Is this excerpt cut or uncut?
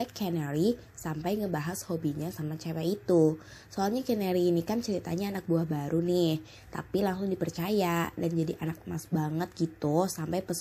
uncut